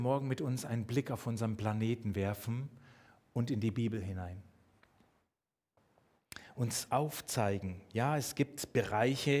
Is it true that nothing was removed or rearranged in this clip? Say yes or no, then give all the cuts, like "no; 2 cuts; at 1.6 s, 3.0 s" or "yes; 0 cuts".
yes; 0 cuts